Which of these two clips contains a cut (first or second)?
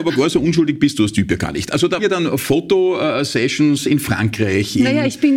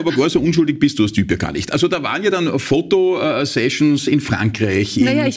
first